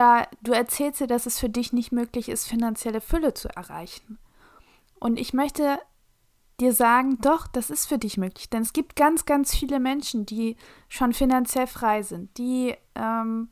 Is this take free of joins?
yes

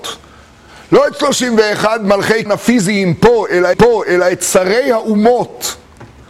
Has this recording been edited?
yes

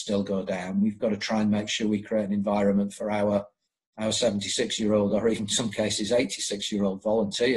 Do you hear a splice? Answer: no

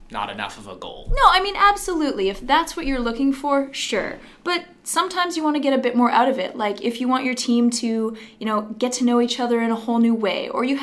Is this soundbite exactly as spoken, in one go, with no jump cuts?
yes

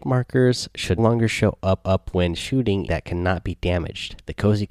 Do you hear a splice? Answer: yes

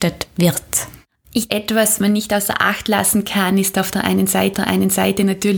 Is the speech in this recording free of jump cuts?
no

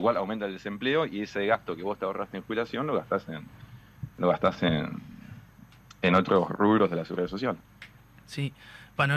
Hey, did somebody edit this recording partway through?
no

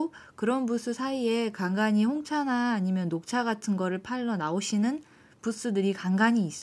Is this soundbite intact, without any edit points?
yes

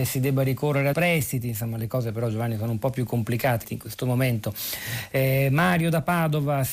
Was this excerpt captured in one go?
no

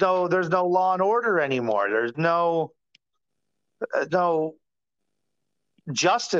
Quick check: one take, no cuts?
no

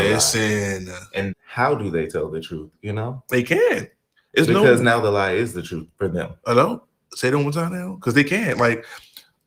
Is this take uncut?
no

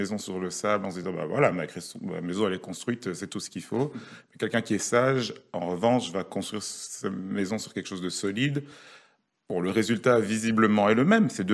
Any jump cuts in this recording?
no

